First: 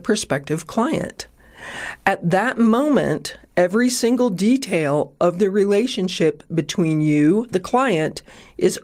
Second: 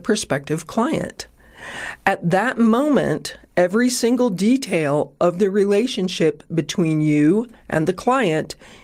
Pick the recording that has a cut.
first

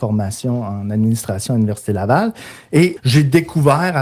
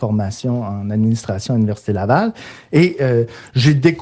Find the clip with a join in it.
first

